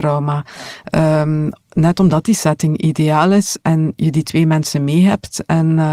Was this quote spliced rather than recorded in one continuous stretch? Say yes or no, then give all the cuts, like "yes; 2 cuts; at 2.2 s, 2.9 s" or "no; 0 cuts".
no; 0 cuts